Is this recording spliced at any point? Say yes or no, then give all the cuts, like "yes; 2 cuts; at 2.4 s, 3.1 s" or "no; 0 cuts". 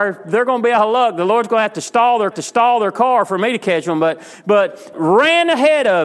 yes; 2 cuts; at 2.3 s, 4.9 s